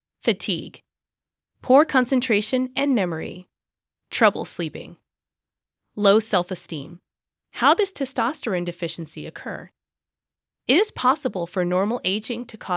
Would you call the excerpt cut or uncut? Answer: uncut